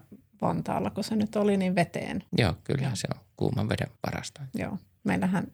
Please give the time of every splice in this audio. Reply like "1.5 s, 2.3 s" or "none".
2.3 s, 4.0 s